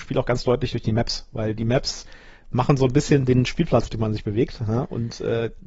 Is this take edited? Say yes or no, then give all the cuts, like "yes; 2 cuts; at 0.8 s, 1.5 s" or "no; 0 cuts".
yes; 1 cut; at 3.9 s